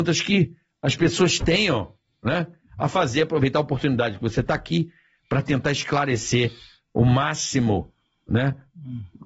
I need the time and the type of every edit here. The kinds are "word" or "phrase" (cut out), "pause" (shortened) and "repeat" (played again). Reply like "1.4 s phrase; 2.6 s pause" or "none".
none